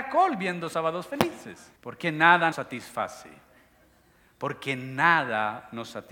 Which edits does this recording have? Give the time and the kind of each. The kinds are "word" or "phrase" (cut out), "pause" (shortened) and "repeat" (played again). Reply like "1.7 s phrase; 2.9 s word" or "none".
1.8 s pause; 2.5 s word

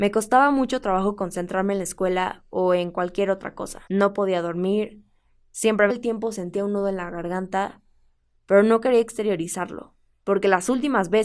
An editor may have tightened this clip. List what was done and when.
3.9 s pause; 5.9 s phrase

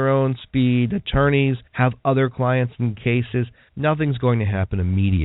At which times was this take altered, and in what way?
1.7 s pause; 3.7 s word

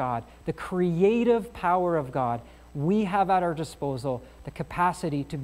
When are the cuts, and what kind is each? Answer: none

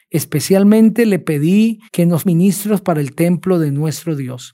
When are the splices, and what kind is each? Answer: 1.9 s pause; 2.3 s word

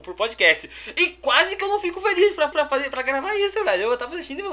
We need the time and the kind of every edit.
2.5 s repeat

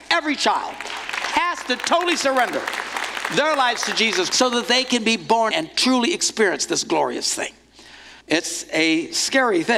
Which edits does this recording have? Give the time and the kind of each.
4.3 s word; 5.5 s word; 8.2 s pause

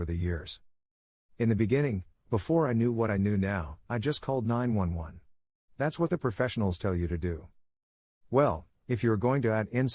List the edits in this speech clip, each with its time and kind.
none

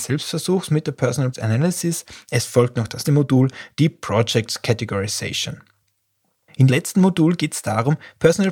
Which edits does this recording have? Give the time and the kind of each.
1.3 s word; 3.0 s word; 6.7 s word

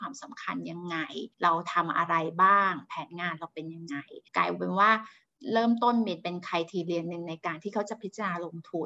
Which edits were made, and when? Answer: 1.3 s pause; 4.3 s pause

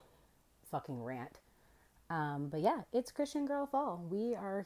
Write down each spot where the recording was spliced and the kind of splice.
none

